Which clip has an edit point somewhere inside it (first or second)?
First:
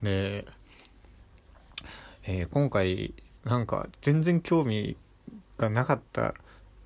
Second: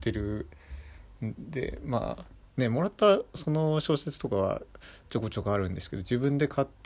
first